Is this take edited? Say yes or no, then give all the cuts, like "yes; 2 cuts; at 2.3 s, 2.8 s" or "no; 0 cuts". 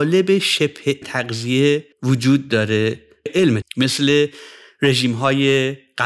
yes; 4 cuts; at 1.0 s, 1.9 s, 3.3 s, 3.6 s